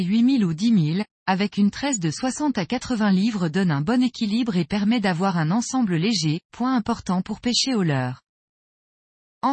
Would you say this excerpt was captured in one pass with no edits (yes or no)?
no